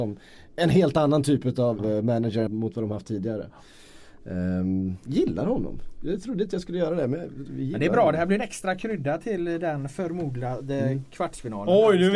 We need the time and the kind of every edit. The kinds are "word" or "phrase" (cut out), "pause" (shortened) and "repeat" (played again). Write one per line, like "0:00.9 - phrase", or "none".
0:01.8 - word
0:02.5 - word